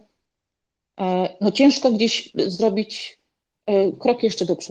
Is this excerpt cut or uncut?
uncut